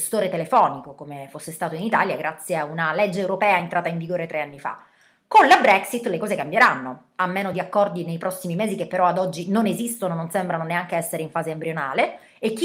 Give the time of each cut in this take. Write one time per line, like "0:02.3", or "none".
none